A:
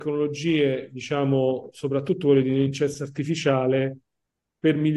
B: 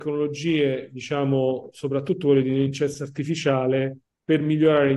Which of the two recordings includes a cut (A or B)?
B